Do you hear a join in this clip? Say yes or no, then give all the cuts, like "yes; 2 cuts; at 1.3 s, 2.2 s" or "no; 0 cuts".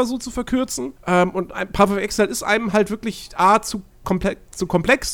yes; 1 cut; at 1.0 s